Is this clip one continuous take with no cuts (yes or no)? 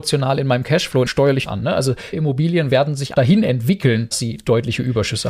no